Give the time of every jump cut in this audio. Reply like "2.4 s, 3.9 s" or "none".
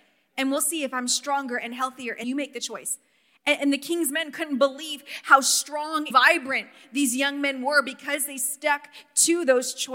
2.2 s, 3.6 s, 6.1 s